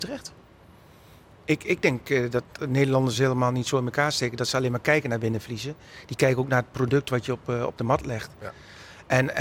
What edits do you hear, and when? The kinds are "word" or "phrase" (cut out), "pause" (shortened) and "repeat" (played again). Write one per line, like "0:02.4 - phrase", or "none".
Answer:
none